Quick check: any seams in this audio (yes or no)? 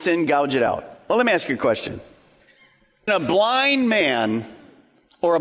yes